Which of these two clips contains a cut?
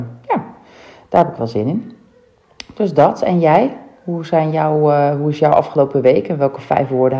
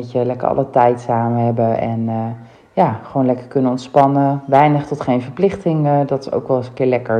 second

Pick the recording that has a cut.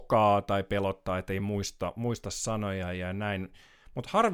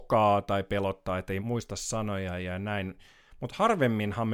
second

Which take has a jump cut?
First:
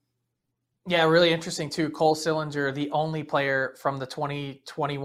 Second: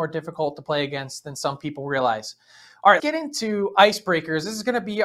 second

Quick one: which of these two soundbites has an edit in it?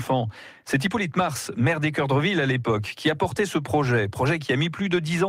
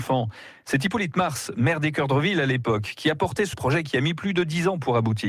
second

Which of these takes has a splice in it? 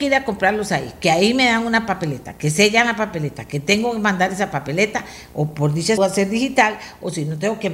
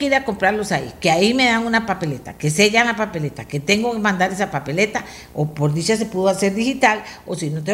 first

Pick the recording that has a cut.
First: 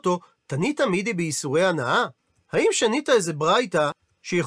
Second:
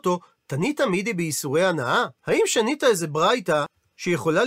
second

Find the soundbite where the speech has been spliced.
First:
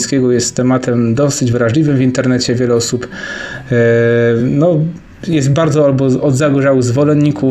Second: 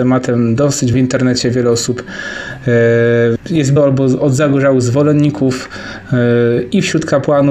second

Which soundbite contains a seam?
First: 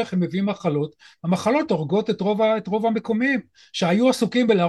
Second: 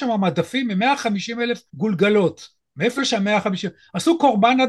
second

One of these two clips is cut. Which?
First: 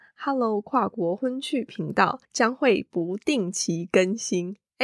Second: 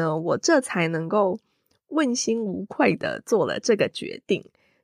first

